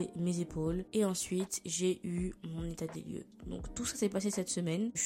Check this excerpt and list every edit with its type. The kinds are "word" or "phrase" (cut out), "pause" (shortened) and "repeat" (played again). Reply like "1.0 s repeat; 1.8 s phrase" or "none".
none